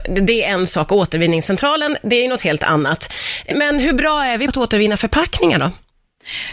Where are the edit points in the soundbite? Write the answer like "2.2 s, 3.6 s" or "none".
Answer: 3.5 s, 4.5 s